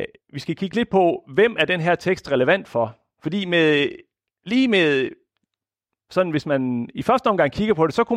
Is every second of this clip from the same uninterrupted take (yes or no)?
yes